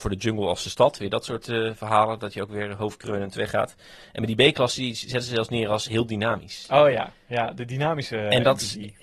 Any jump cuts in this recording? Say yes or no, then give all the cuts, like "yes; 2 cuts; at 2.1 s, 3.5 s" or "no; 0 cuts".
no; 0 cuts